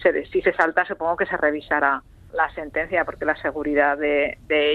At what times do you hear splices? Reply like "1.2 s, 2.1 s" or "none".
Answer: 2.3 s